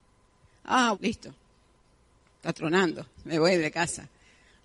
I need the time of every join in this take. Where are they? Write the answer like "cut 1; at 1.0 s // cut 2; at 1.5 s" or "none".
cut 1; at 0.9 s // cut 2; at 3.1 s